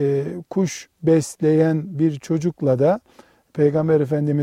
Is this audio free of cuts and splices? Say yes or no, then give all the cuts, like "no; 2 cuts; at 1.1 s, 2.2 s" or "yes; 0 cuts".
yes; 0 cuts